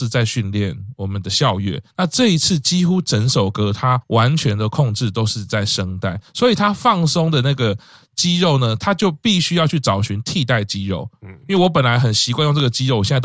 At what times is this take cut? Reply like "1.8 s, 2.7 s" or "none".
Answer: none